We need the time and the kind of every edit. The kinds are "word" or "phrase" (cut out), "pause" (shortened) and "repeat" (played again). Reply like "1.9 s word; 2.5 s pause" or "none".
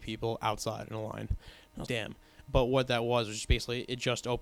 1.9 s word; 2.4 s word